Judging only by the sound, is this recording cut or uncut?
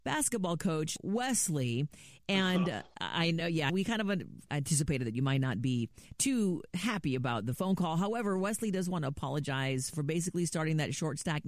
uncut